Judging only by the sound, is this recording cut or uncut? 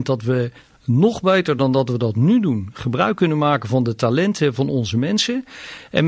uncut